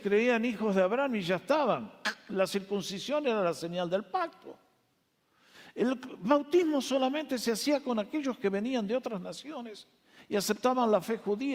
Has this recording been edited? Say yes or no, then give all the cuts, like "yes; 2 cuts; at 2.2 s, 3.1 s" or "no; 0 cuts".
no; 0 cuts